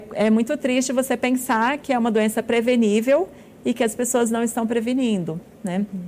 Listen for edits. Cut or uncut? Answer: uncut